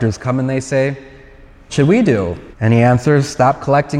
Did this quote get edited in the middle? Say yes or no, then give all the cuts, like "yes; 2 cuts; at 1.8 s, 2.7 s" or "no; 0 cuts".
yes; 2 cuts; at 1.7 s, 2.5 s